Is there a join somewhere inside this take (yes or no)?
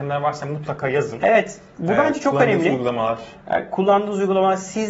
no